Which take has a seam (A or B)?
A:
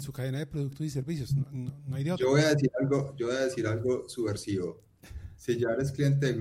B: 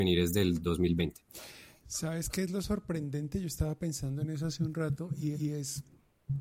B